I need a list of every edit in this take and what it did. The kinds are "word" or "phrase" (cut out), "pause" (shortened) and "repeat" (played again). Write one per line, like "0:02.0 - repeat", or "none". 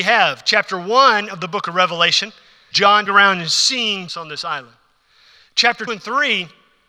0:02.7 - word
0:03.1 - word
0:04.1 - word
0:05.9 - word